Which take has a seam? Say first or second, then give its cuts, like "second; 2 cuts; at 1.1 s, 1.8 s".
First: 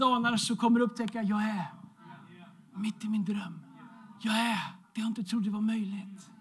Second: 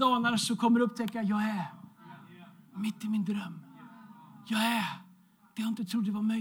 first; 2 cuts; at 4.2 s, 4.8 s